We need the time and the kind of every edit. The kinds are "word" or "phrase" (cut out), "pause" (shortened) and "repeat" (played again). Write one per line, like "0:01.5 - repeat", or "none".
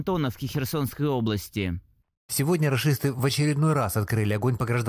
none